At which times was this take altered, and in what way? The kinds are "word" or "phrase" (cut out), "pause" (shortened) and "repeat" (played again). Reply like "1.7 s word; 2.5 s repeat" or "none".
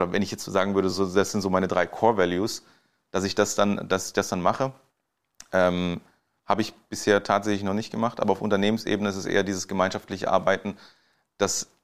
none